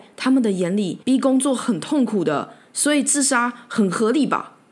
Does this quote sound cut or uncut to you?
cut